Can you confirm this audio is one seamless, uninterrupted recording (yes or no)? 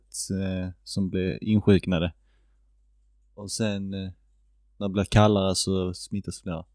yes